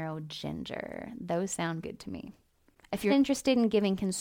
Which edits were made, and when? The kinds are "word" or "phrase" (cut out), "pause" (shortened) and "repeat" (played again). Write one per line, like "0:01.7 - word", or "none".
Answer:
0:01.8 - word
0:03.1 - word